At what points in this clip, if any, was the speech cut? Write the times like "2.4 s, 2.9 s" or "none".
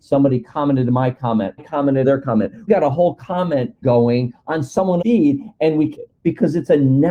1.6 s, 2.0 s, 2.7 s, 3.8 s, 5.0 s, 5.9 s